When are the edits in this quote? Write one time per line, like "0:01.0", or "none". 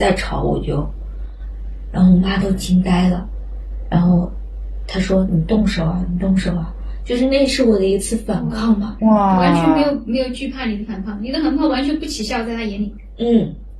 0:09.0